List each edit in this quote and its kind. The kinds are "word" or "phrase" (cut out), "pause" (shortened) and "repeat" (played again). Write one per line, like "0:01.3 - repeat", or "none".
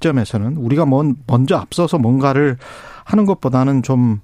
none